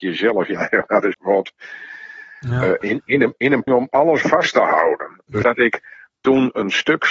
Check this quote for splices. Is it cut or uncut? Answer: cut